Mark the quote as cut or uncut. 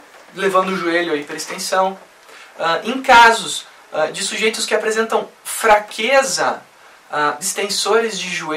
cut